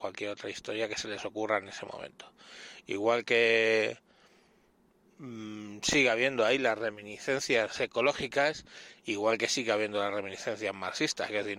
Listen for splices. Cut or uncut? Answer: uncut